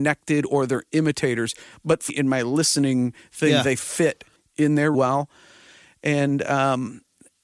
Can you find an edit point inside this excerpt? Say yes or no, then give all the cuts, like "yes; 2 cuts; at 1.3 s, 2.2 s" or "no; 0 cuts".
yes; 2 cuts; at 2.1 s, 4.9 s